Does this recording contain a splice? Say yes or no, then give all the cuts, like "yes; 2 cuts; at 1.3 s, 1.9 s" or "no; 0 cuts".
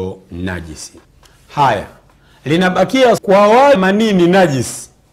yes; 3 cuts; at 1.0 s, 3.2 s, 3.7 s